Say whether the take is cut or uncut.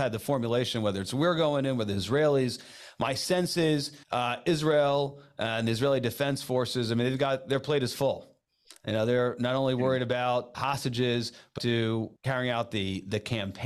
cut